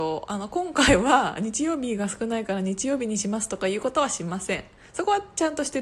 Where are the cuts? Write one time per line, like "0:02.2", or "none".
none